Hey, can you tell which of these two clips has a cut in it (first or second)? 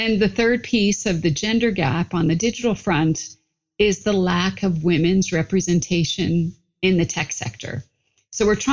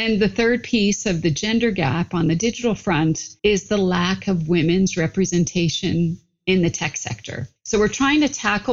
second